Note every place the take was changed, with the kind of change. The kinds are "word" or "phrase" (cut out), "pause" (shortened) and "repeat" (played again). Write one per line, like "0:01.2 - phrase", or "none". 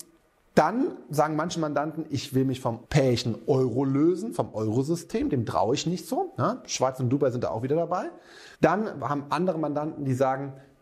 0:02.8 - word
0:08.5 - pause